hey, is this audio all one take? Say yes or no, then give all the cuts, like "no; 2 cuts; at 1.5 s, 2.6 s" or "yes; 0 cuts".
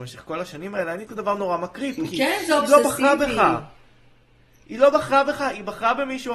no; 1 cut; at 1.1 s